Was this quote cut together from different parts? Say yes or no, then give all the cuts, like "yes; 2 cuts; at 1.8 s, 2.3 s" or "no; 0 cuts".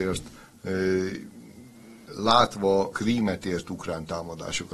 yes; 2 cuts; at 2.1 s, 2.9 s